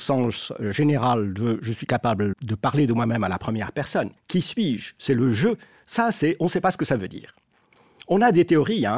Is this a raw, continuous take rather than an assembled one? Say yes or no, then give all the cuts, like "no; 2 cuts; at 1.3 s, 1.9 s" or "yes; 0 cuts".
no; 2 cuts; at 2.3 s, 4.2 s